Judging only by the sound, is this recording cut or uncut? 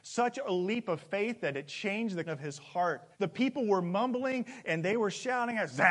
cut